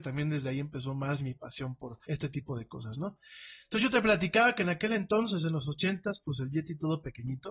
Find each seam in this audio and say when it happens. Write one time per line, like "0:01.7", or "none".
0:02.0